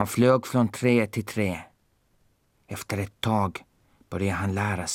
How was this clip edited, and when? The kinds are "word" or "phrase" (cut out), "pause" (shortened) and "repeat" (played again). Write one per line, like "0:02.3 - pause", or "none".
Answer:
none